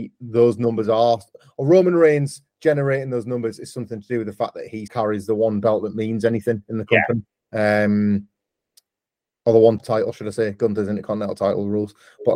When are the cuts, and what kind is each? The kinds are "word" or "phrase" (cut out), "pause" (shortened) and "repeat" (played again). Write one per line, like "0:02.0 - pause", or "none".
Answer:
0:04.9 - word
0:07.4 - pause
0:09.8 - word